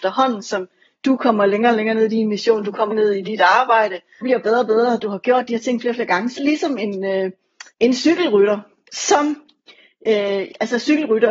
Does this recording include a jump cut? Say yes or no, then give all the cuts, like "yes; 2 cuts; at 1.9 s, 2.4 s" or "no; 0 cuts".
yes; 4 cuts; at 2.9 s, 4.2 s, 6.4 s, 7.7 s